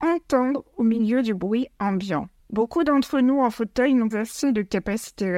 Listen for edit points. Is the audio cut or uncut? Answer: cut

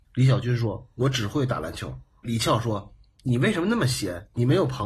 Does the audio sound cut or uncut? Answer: uncut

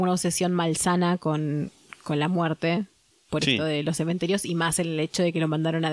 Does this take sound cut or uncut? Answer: uncut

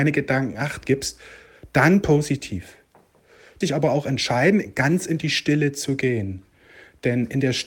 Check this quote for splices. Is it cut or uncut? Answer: cut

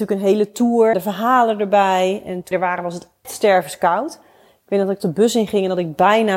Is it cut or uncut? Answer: cut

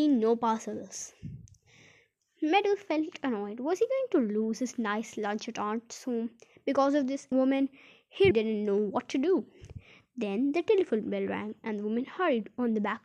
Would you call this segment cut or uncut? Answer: cut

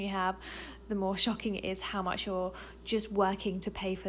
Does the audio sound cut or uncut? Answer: uncut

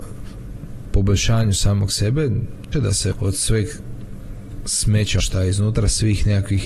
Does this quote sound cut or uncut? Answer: cut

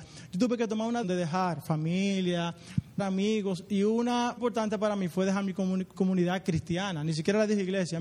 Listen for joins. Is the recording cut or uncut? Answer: cut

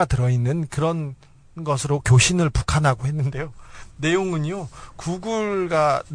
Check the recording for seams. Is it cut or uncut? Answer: uncut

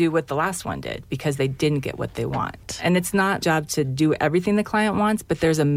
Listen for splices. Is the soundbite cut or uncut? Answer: cut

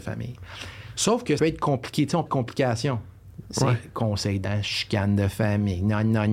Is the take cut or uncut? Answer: cut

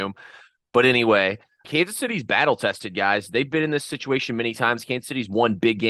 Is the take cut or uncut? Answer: cut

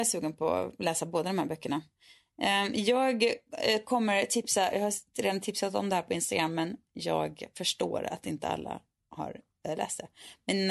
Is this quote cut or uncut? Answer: uncut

